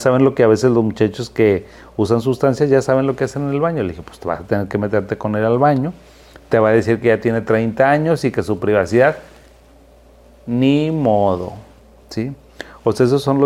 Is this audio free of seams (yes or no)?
yes